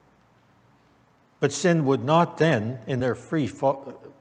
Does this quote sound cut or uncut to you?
uncut